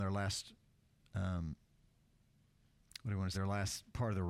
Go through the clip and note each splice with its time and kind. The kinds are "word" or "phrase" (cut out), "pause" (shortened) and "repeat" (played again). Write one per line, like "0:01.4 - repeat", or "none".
0:03.3 - word